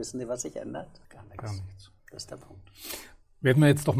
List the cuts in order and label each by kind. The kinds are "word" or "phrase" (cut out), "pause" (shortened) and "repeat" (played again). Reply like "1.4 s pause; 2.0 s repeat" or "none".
1.0 s pause; 2.0 s pause